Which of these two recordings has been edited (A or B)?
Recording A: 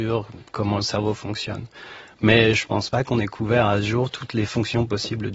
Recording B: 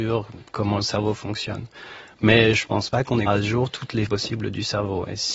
B